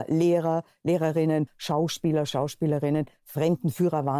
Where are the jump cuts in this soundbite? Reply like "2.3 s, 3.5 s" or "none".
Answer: 1.5 s